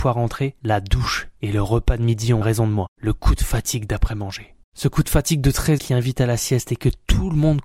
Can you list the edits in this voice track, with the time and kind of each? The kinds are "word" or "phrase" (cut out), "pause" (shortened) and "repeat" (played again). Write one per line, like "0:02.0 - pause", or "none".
0:02.4 - word
0:02.9 - pause
0:04.6 - pause
0:05.8 - word